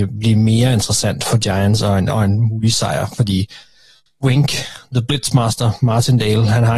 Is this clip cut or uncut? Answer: cut